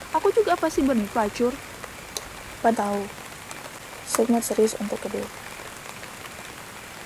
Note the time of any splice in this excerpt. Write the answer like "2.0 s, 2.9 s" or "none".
1.1 s, 2.7 s, 4.4 s, 5.0 s